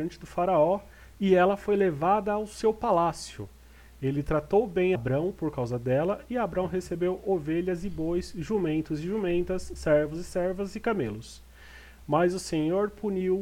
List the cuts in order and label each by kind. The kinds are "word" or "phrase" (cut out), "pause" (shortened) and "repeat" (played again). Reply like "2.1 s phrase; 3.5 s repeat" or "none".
5.0 s word

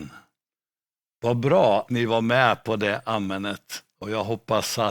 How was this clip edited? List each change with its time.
1.9 s word

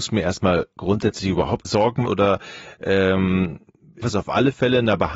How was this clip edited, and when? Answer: 1.6 s word; 2.0 s word; 4.0 s word

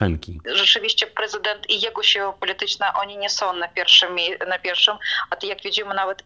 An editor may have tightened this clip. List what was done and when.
none

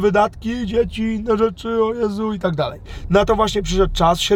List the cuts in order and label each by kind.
none

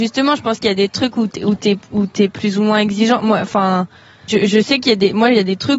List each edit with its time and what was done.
4.3 s word

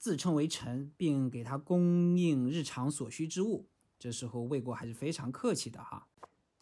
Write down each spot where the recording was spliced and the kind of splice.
none

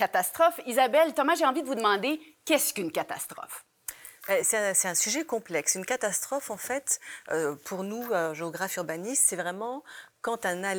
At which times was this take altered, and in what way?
4.4 s word

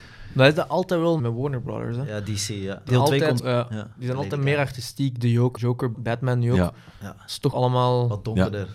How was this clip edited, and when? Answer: 1.2 s word; 2.9 s word; 3.4 s word; 5.6 s word; 5.9 s word; 7.5 s word

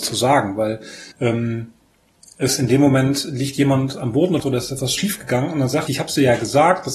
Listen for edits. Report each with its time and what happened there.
1.1 s pause; 4.4 s phrase; 5.0 s word; 5.9 s word

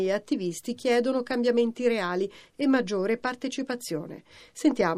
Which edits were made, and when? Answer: none

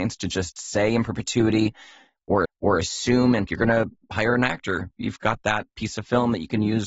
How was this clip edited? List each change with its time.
2.5 s repeat; 3.5 s phrase; 5.7 s pause

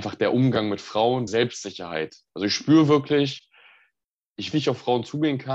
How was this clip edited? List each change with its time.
1.3 s word; 4.5 s word

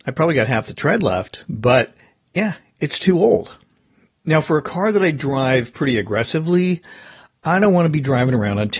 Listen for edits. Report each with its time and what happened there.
none

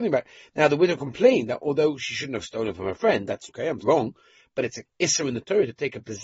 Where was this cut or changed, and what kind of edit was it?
3.5 s word; 3.8 s phrase; 4.8 s word

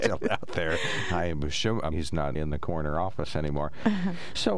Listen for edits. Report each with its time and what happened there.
1.9 s word; 2.3 s word

